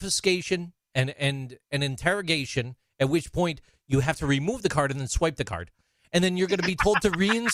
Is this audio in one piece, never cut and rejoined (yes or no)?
yes